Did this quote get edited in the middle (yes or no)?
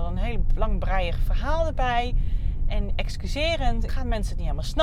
yes